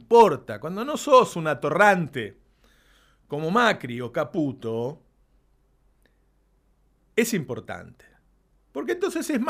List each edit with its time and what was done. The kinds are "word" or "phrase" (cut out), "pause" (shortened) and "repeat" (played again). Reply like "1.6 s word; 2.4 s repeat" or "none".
none